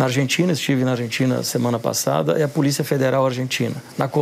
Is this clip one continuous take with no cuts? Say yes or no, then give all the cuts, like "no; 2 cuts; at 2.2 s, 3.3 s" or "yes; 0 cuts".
yes; 0 cuts